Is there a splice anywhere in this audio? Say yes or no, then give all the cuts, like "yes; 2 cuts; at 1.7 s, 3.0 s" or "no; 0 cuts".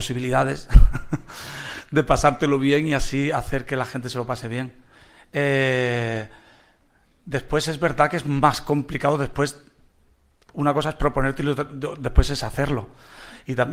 no; 0 cuts